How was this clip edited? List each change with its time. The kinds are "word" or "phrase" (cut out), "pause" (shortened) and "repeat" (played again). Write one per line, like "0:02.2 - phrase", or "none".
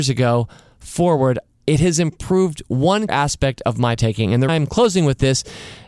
0:03.1 - word
0:04.0 - word
0:04.5 - word